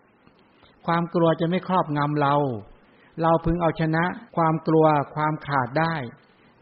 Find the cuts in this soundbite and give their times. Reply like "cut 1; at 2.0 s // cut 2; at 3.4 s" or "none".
cut 1; at 4.3 s

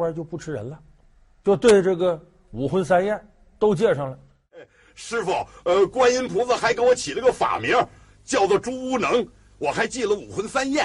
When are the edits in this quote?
none

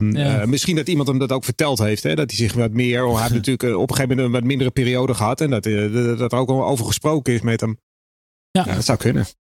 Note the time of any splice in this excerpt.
none

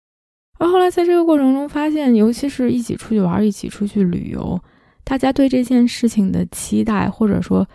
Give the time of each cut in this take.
none

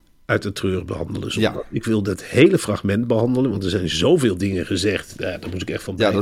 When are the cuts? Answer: none

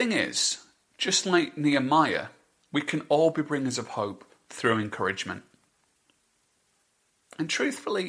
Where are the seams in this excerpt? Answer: none

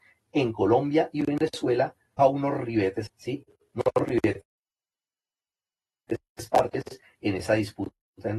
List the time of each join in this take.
cut 1; at 2.2 s // cut 2; at 3.1 s

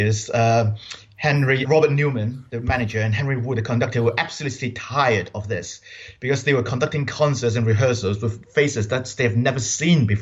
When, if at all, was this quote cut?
cut 1; at 1.6 s

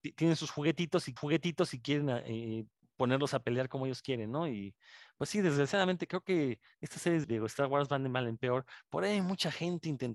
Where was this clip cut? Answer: cut 1; at 1.2 s // cut 2; at 2.8 s // cut 3; at 7.2 s

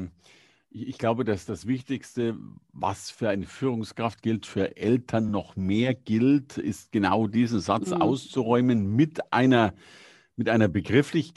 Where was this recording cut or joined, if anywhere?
none

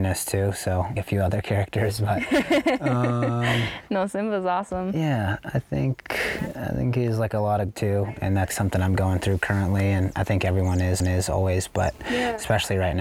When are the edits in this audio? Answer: cut 1; at 1.0 s // cut 2; at 7.7 s // cut 3; at 8.5 s // cut 4; at 11.0 s

